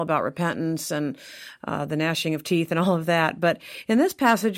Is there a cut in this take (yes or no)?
no